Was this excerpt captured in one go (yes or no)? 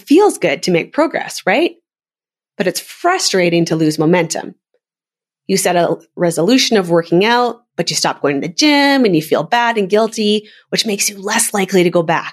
yes